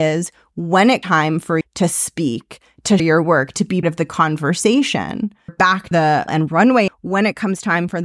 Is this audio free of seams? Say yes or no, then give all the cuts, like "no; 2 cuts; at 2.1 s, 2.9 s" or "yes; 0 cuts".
no; 8 cuts; at 1.0 s, 1.6 s, 3.0 s, 3.8 s, 5.5 s, 5.9 s, 6.3 s, 6.9 s